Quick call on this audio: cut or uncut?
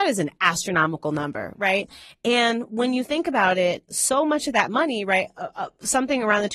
cut